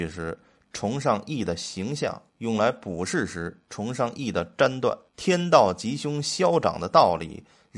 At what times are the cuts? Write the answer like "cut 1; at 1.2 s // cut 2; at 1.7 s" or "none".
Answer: cut 1; at 2.3 s // cut 2; at 5.1 s

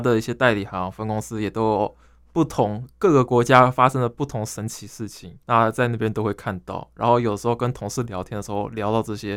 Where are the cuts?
cut 1; at 5.4 s

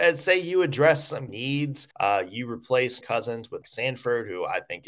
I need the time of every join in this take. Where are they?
cut 1; at 1.3 s // cut 2; at 1.9 s // cut 3; at 3.0 s // cut 4; at 3.6 s

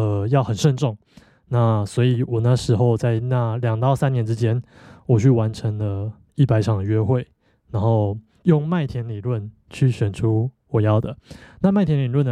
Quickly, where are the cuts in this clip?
none

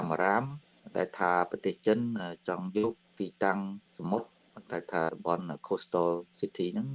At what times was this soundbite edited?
cut 1; at 3.9 s

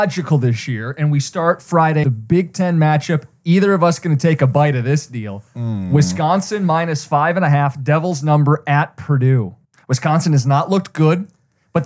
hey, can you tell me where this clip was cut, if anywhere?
cut 1; at 2.0 s // cut 2; at 9.6 s

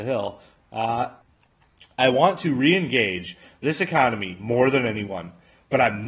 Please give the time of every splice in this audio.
none

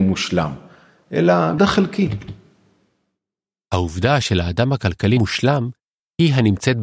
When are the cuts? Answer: cut 1; at 1.6 s // cut 2; at 4.2 s // cut 3; at 5.2 s

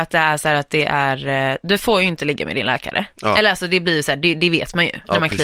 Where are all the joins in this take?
none

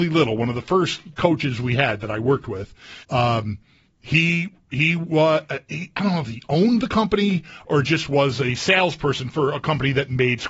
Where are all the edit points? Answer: cut 1; at 3.0 s

